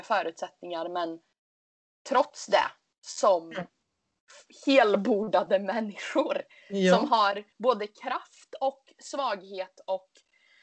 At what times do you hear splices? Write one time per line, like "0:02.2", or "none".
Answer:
0:07.5